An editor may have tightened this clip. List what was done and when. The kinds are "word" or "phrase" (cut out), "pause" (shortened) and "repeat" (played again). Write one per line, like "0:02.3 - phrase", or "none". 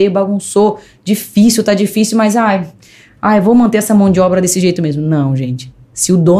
none